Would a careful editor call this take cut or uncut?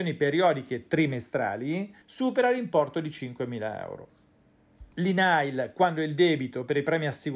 cut